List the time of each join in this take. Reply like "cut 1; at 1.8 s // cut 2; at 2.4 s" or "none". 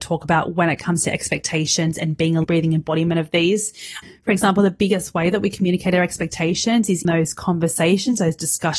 cut 1; at 2.4 s // cut 2; at 7.0 s